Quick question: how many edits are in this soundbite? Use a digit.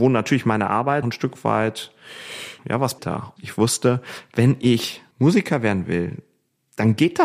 5